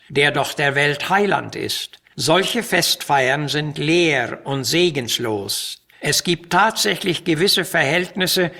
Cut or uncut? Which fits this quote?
cut